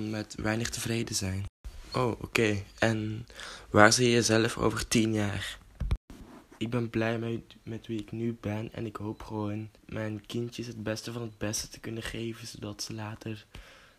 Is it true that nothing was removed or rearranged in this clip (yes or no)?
no